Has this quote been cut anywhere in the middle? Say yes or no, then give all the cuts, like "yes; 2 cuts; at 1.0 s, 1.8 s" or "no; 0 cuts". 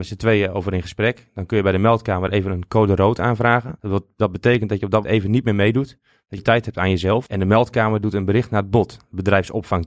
yes; 2 cuts; at 5.0 s, 6.4 s